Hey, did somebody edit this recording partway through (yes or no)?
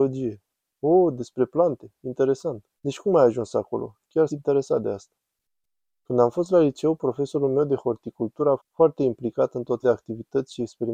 yes